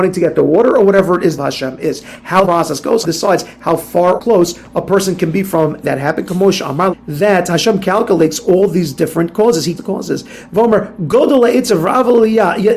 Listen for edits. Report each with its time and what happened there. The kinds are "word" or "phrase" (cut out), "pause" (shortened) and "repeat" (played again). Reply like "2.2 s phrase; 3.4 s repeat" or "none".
1.4 s phrase; 2.4 s word; 3.0 s word; 4.2 s word; 5.8 s word; 6.9 s phrase; 9.8 s word

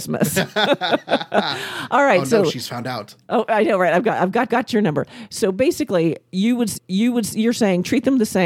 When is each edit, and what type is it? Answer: 4.5 s repeat; 6.8 s repeat

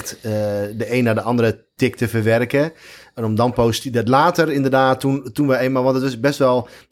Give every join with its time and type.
none

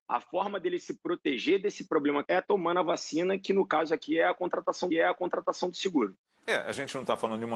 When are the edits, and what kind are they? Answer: 2.2 s word; 4.9 s repeat; 6.3 s pause

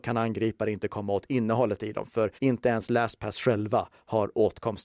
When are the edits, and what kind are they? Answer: 2.4 s pause

